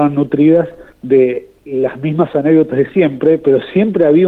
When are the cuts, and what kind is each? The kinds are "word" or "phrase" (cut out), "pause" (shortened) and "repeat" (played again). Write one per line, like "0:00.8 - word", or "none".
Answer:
0:00.9 - pause